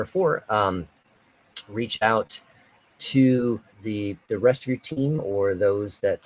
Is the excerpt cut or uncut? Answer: cut